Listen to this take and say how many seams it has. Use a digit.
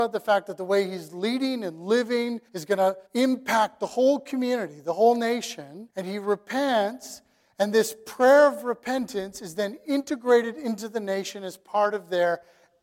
3